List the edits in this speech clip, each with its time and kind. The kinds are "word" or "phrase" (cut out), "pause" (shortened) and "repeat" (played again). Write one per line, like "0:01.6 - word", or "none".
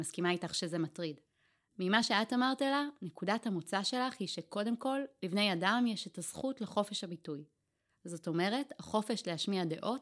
none